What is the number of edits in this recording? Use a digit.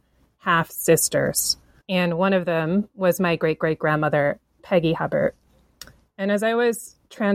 1